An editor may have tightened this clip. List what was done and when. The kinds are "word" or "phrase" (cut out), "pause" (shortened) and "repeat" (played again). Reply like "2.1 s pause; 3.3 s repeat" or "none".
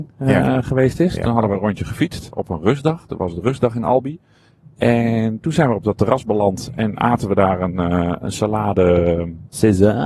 none